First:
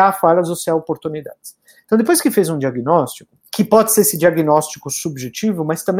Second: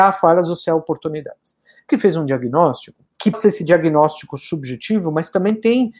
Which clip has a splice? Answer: second; 2 cuts; at 1.9 s, 3.3 s

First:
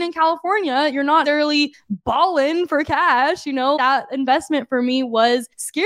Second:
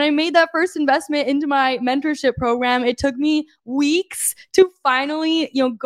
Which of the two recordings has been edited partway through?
first; 2 cuts; at 1.2 s, 3.8 s

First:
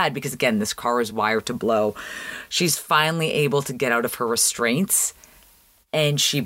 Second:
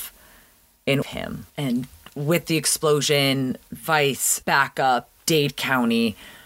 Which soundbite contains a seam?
second; 3 cuts; at 1.0 s, 1.5 s, 4.4 s

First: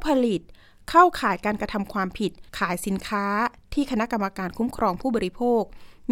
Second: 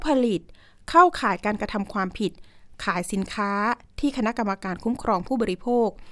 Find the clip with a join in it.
first; 1 cut; at 2.5 s

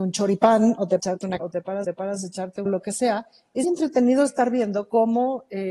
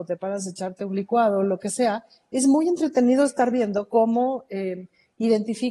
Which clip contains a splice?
first; 5 cuts; at 1.0 s, 1.4 s, 1.8 s, 2.7 s, 3.6 s

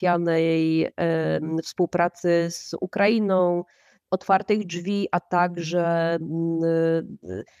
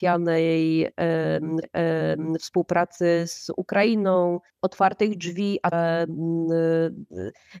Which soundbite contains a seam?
second; 3 cuts; at 1.6 s, 4.5 s, 5.7 s

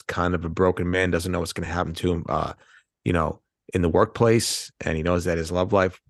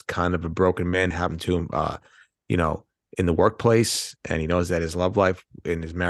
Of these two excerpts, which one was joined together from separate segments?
second; 1 cut; at 1.1 s

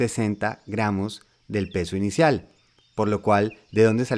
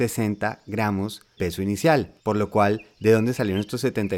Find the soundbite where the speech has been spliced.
second; 2 cuts; at 1.4 s, 2.2 s

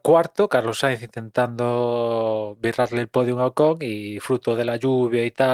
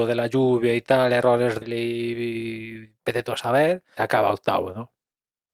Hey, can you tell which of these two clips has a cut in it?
second; 2 cuts; at 1.6 s, 4.0 s

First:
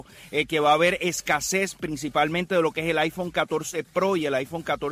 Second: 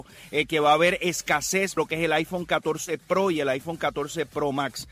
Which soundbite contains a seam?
second; 1 cut; at 1.8 s

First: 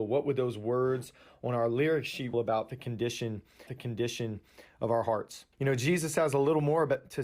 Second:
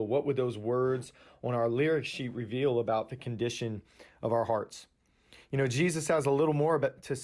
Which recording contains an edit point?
first; 3 cuts; at 2.3 s, 3.7 s, 5.5 s

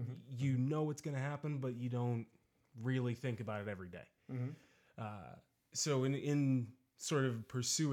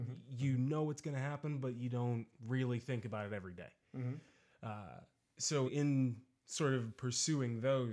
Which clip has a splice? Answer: second; 2 cuts; at 2.4 s, 5.7 s

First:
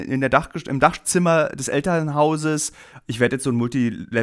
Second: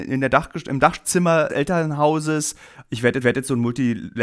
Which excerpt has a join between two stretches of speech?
second; 2 cuts; at 1.5 s, 3.2 s

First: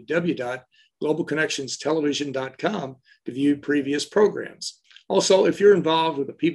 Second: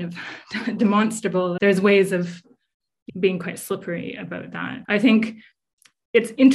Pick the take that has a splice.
second; 3 cuts; at 1.6 s, 3.1 s, 4.8 s

